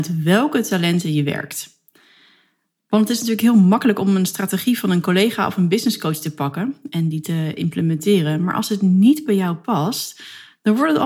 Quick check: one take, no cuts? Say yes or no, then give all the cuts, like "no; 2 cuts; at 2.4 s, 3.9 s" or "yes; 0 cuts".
yes; 0 cuts